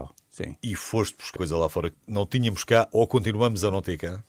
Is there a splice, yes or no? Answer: yes